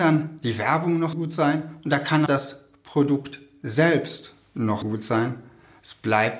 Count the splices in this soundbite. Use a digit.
3